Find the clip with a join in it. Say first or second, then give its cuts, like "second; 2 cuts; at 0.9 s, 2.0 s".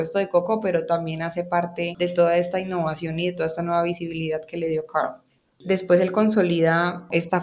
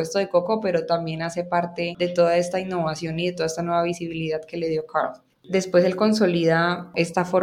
second; 1 cut; at 5.3 s